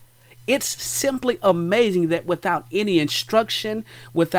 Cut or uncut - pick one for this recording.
uncut